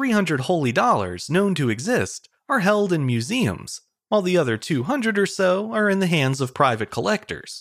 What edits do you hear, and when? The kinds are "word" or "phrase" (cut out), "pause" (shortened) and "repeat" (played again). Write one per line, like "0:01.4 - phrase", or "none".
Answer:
none